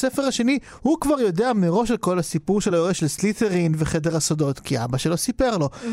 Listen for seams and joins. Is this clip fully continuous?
yes; 0 cuts

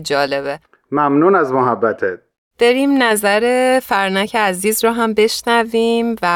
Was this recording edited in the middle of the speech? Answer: no; 0 cuts

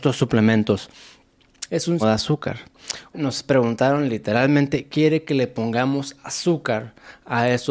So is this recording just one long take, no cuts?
no; 3 cuts; at 1.7 s, 2.0 s, 3.1 s

